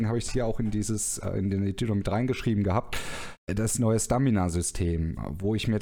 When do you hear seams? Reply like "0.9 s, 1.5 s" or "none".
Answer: 3.4 s

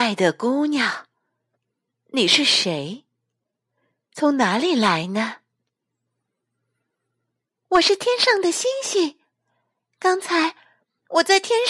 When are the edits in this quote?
none

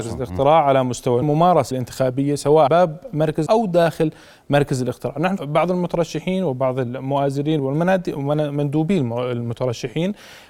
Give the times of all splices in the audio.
1.2 s, 1.7 s, 2.7 s, 3.5 s, 5.4 s, 7.6 s

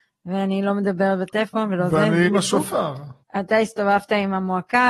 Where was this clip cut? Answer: 2.3 s, 3.2 s

